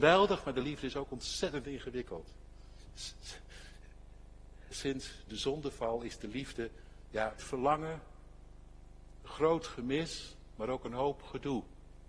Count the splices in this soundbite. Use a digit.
1